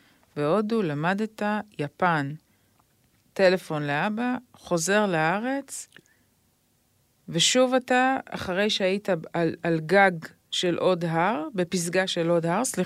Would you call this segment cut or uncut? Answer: uncut